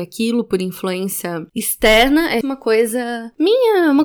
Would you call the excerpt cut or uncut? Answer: cut